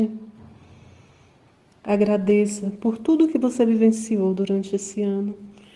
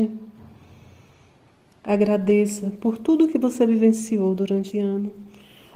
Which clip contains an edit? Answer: second; 1 cut; at 4.7 s

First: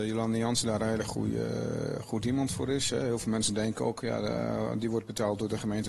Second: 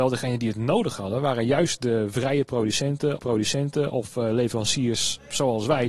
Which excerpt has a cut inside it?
second; 1 cut; at 3.2 s

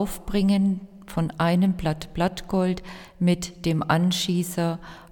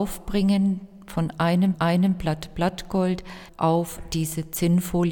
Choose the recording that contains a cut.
second; 2 cuts; at 1.7 s, 3.5 s

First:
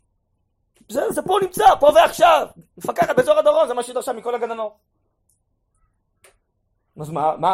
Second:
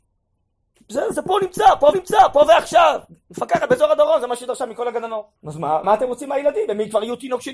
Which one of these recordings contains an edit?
second; 3 cuts; at 1.9 s, 5.4 s, 5.8 s

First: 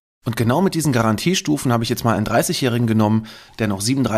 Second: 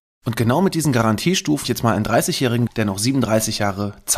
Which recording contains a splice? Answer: second; 2 cuts; at 1.6 s, 2.7 s

